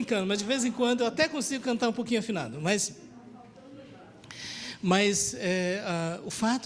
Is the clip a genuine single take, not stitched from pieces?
yes; 0 cuts

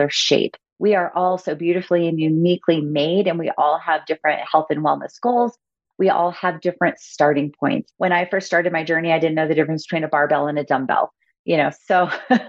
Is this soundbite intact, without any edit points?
no; 1 cut; at 7.9 s

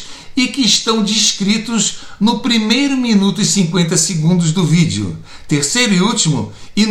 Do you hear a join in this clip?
no; 0 cuts

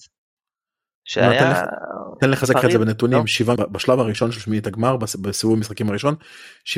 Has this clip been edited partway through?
yes; 1 cut; at 3.6 s

